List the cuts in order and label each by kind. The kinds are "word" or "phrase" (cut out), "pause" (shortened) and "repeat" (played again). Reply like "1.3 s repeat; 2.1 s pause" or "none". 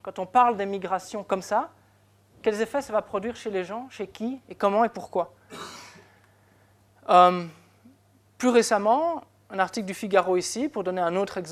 none